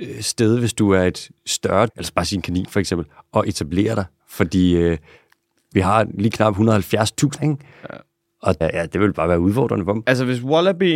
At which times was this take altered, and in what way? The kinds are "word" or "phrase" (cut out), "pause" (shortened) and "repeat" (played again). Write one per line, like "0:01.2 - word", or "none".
0:01.9 - word
0:07.4 - word
0:08.6 - word